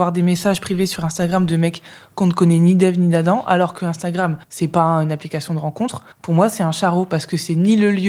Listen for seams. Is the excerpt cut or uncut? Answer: cut